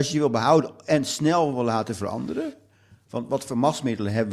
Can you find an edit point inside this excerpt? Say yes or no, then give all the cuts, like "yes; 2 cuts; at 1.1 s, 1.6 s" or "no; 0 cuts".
no; 0 cuts